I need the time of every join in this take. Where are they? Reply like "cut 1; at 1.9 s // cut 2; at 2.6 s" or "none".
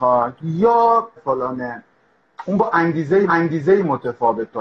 cut 1; at 1.2 s // cut 2; at 3.3 s